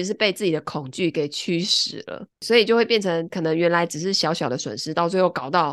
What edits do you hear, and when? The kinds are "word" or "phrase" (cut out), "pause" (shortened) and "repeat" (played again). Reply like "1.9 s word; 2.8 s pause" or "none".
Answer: 2.3 s pause